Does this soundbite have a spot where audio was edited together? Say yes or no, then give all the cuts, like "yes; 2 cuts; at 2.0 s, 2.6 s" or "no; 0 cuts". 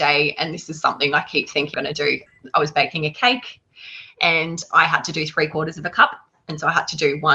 yes; 1 cut; at 1.7 s